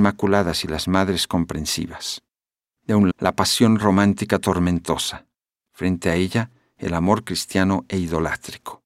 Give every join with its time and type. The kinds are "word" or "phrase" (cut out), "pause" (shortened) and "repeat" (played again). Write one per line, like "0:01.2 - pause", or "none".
0:03.1 - word